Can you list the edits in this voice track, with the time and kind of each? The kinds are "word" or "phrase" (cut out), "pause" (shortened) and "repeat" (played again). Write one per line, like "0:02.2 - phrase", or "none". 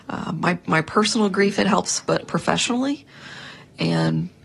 0:02.2 - word